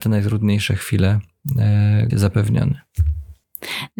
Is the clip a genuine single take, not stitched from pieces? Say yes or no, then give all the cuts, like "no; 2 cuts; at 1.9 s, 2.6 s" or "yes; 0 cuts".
no; 1 cut; at 2.1 s